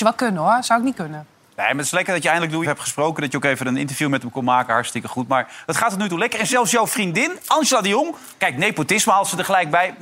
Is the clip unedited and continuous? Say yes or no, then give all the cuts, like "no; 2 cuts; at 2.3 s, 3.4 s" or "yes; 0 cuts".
no; 1 cut; at 2.6 s